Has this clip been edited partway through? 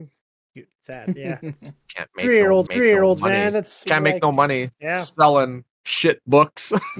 yes; 3 cuts; at 1.2 s, 2.7 s, 5.7 s

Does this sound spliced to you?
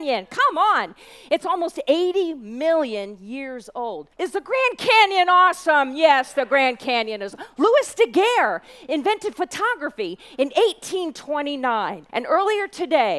yes; 2 cuts; at 4.1 s, 12.1 s

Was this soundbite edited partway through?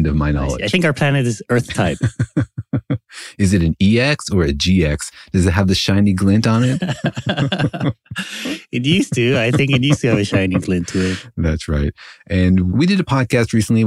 no; 0 cuts

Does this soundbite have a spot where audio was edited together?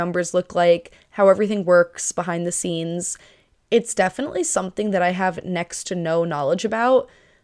no; 0 cuts

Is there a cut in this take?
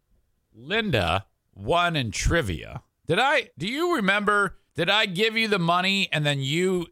yes; 3 cuts; at 3.0 s, 3.5 s, 4.7 s

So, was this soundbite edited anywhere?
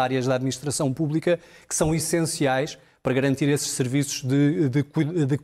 no; 0 cuts

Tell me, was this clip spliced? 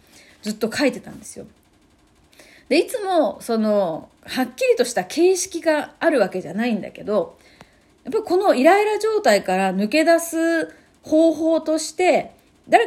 yes; 1 cut; at 4.2 s

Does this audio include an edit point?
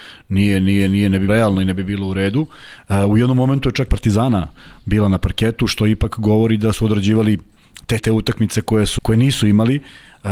yes; 5 cuts; at 1.3 s, 3.9 s, 6.7 s, 8.0 s, 9.0 s

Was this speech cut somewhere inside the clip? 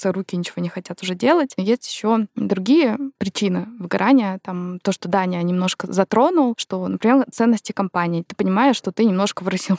no; 0 cuts

